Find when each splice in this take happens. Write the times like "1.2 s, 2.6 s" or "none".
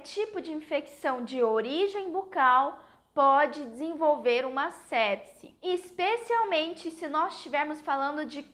none